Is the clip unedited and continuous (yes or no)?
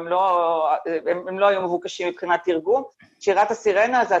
yes